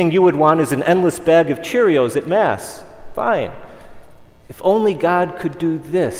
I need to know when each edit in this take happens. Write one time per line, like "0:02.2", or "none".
none